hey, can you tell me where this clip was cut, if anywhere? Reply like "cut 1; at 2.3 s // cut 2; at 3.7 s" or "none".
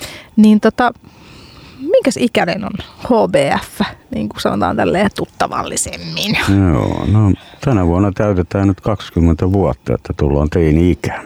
none